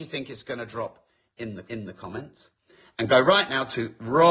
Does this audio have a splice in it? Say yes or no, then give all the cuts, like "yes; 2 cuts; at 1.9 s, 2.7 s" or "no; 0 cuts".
yes; 1 cut; at 1.6 s